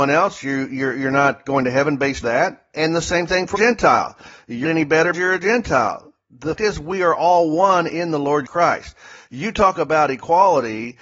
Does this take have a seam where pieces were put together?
yes; 6 cuts; at 2.2 s, 3.5 s, 4.6 s, 5.1 s, 6.6 s, 8.5 s

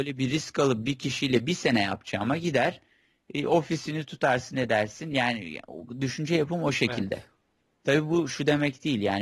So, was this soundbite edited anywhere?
no; 0 cuts

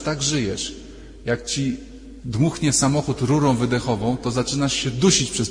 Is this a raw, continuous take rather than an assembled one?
yes; 0 cuts

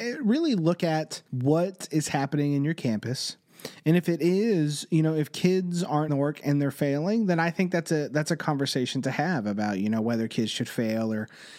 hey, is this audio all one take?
no; 2 cuts; at 1.3 s, 6.1 s

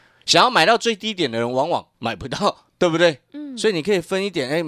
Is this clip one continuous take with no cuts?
no; 2 cuts; at 1.9 s, 2.7 s

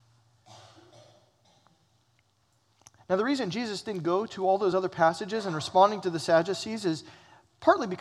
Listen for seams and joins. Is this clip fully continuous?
yes; 0 cuts

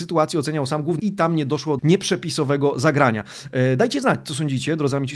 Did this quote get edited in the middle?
yes; 2 cuts; at 1.0 s, 1.8 s

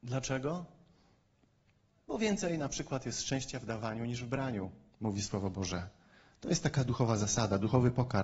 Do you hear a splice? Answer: no; 0 cuts

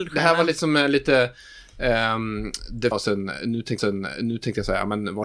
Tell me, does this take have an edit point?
yes; 2 cuts; at 2.9 s, 3.8 s

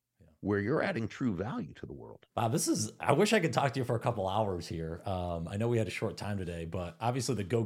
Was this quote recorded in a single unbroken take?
no; 1 cut; at 2.3 s

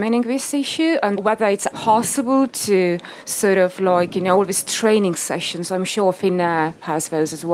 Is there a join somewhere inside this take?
yes; 2 cuts; at 1.2 s, 1.7 s

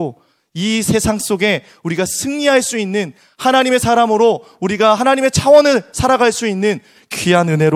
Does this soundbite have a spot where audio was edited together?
no; 0 cuts

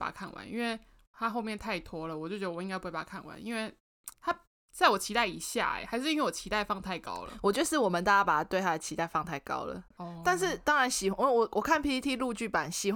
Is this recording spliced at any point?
yes; 2 cuts; at 4.1 s, 9.9 s

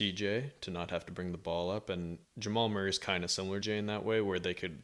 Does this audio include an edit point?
yes; 2 cuts; at 2.2 s, 3.6 s

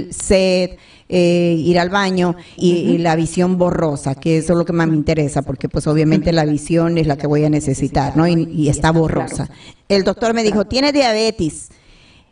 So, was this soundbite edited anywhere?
yes; 1 cut; at 2.6 s

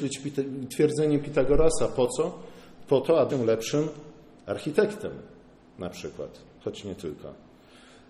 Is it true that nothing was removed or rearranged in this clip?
no; 1 cut; at 3.3 s

